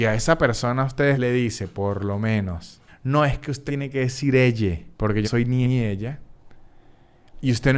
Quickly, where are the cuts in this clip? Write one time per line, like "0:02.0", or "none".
0:01.1
0:02.9
0:03.7
0:04.9
0:05.2
0:05.6